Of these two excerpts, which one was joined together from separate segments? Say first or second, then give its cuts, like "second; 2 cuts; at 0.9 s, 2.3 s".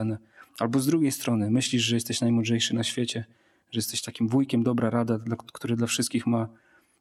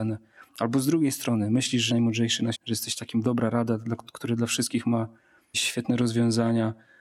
second; 4 cuts; at 1.9 s, 2.5 s, 3.2 s, 5.5 s